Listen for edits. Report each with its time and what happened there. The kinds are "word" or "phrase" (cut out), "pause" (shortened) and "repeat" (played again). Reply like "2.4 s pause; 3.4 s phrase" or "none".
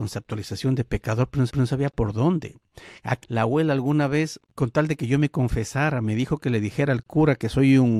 1.5 s repeat; 3.2 s phrase; 4.5 s pause